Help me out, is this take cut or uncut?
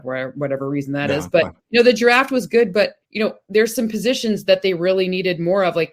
cut